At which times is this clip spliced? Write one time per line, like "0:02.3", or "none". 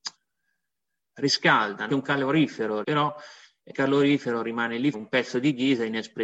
0:01.9
0:02.8
0:03.7
0:04.9